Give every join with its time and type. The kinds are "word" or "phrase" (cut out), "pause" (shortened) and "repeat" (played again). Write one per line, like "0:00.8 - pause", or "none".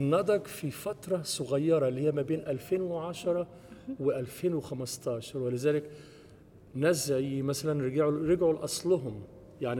none